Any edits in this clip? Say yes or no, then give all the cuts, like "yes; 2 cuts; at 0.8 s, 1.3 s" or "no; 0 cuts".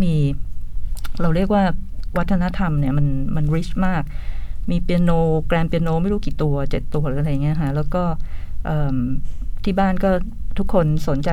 yes; 1 cut; at 2.1 s